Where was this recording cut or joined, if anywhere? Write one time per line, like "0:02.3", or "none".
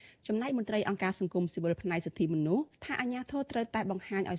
0:02.7